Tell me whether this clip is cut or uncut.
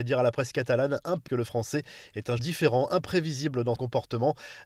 cut